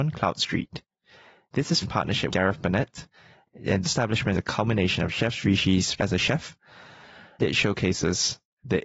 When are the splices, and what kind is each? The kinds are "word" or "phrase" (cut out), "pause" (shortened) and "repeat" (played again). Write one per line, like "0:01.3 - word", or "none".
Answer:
0:01.8 - word
0:02.3 - word
0:03.8 - word
0:04.3 - word
0:06.0 - word
0:07.4 - word